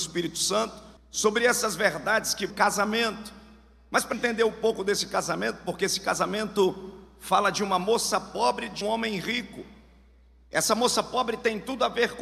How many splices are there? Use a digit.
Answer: 4